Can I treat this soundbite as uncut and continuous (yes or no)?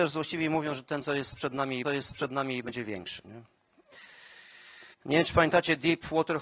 no